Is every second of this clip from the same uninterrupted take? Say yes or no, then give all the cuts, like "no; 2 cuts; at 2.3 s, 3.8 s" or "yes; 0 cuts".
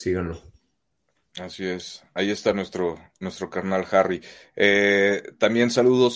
yes; 0 cuts